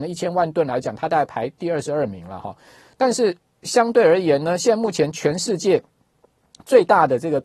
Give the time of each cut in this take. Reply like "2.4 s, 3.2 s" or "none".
none